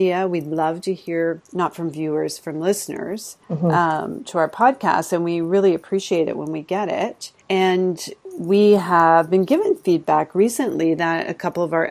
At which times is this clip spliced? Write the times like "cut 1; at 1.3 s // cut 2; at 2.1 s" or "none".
cut 1; at 1.4 s // cut 2; at 3.4 s // cut 3; at 7.4 s